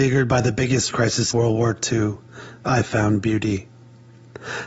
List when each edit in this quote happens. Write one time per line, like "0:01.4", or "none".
0:00.9
0:01.3